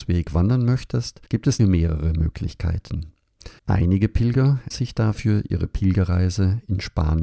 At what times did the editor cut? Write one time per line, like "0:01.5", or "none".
0:01.3
0:01.6
0:03.6
0:04.7